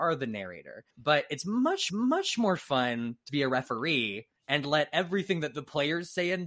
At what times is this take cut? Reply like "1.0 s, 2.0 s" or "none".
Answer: 0.9 s, 1.9 s, 3.3 s, 4.4 s